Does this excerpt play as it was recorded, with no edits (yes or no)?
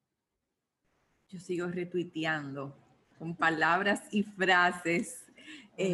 yes